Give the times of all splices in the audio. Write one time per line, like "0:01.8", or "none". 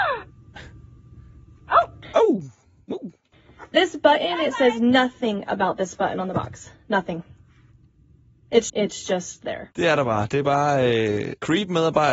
0:08.7